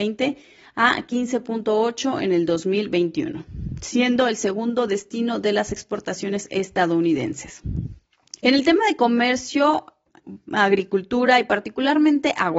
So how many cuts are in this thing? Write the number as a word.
one